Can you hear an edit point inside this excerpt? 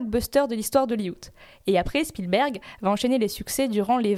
no; 0 cuts

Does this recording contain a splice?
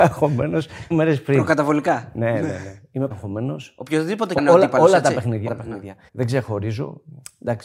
yes; 5 cuts; at 0.9 s, 3.1 s, 4.4 s, 5.5 s, 6.1 s

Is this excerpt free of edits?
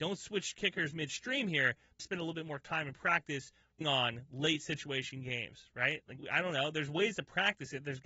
no; 3 cuts; at 2.0 s, 3.8 s, 6.2 s

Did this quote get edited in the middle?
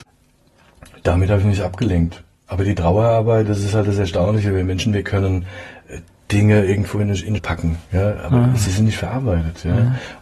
yes; 1 cut; at 7.4 s

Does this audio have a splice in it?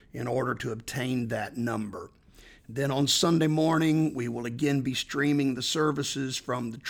no; 0 cuts

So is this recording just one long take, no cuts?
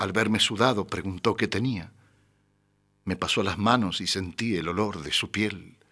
yes; 0 cuts

